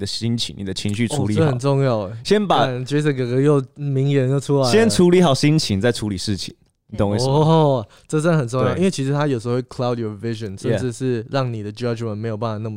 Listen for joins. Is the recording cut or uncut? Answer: uncut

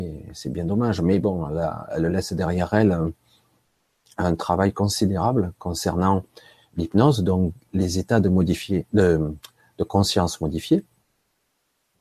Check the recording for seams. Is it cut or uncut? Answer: uncut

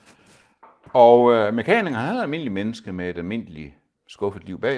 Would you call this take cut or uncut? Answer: uncut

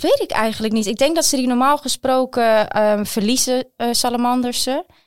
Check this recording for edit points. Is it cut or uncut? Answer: uncut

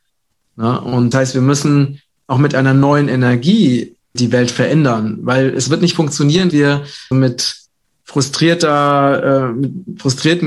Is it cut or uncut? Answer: cut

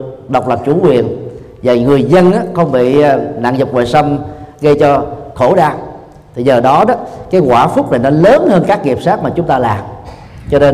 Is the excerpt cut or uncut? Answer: uncut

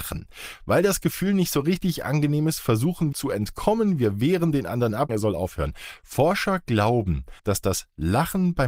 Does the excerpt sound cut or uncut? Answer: cut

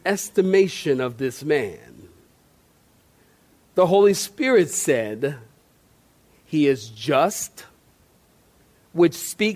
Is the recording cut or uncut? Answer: uncut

